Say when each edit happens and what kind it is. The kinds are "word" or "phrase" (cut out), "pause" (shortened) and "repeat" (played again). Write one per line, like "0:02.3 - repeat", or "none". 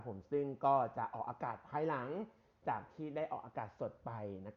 none